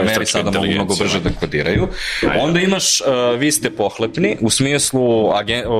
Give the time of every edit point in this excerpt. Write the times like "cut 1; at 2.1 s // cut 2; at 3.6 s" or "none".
none